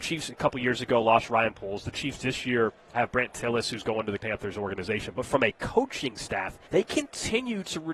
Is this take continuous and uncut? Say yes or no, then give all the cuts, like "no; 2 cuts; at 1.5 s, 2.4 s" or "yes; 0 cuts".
no; 3 cuts; at 2.9 s, 4.2 s, 6.6 s